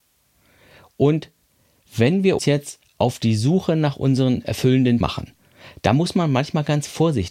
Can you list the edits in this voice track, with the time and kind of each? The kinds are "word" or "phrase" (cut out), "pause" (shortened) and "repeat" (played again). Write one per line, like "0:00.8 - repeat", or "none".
0:02.4 - word
0:05.0 - word